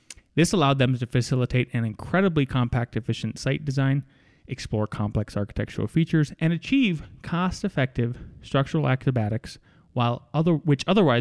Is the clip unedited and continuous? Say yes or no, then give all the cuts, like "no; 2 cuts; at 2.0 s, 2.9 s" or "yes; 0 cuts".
yes; 0 cuts